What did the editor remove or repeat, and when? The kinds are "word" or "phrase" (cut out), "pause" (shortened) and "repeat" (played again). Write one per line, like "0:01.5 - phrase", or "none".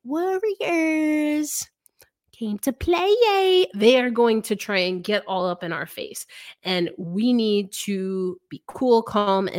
none